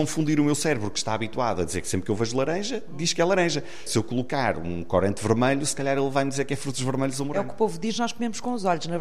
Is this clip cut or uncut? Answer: uncut